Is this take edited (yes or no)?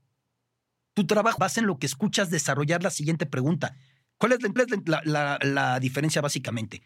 yes